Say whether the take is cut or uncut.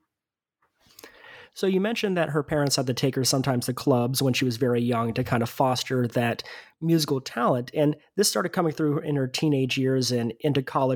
uncut